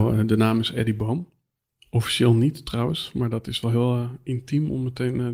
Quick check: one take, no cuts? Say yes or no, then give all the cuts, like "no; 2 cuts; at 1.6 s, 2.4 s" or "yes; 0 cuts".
yes; 0 cuts